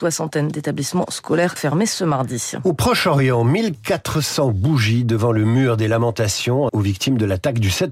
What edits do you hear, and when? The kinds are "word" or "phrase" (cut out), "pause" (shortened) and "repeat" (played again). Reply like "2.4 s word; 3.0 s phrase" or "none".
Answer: 1.6 s word; 6.7 s word